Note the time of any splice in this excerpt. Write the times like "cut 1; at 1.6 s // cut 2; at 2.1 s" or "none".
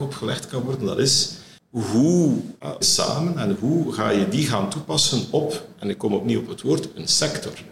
cut 1; at 2.8 s